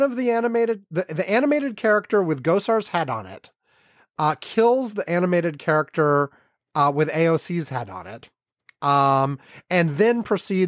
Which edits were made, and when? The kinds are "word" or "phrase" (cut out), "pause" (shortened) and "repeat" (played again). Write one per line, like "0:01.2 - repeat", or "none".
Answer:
none